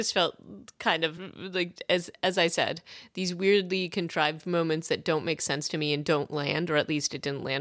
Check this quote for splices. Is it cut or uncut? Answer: uncut